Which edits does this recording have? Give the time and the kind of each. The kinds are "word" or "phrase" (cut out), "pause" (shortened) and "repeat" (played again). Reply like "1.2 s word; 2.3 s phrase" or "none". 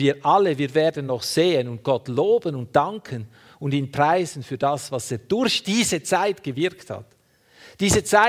none